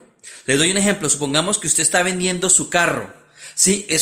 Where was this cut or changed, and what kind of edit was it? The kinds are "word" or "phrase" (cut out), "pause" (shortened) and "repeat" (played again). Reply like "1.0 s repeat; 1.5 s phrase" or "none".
none